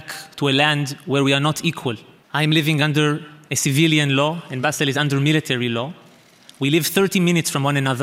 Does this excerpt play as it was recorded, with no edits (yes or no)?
yes